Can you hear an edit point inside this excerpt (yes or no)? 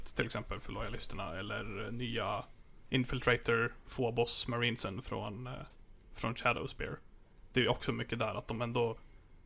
no